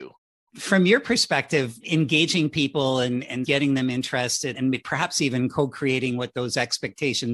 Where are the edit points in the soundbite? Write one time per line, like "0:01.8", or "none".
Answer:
none